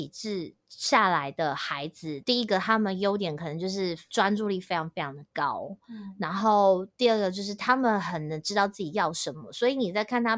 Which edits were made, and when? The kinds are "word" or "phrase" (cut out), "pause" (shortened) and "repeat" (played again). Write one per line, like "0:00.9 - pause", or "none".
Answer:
none